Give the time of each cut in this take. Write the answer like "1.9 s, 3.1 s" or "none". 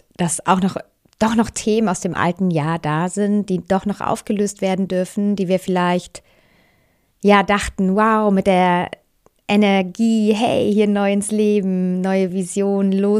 none